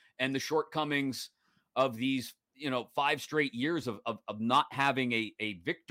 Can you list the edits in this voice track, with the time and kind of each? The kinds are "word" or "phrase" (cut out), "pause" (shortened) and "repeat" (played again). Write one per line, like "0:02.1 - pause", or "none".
none